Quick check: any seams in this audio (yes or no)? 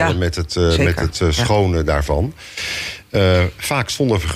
no